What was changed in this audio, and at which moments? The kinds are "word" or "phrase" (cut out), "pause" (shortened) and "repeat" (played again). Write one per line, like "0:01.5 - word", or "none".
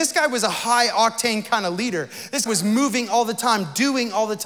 0:02.5 - word